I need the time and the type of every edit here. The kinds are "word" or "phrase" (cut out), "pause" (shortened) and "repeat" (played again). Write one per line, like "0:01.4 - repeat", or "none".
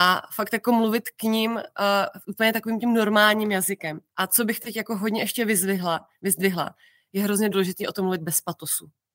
0:04.1 - pause